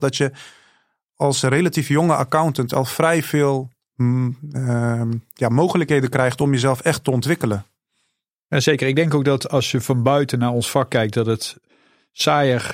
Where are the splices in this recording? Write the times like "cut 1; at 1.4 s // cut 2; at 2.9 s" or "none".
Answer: none